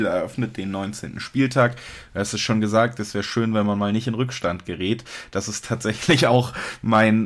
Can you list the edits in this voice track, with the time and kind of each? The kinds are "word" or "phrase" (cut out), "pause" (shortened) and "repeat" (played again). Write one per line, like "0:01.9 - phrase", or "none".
none